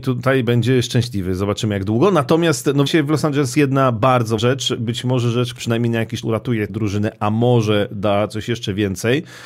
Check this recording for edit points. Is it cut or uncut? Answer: cut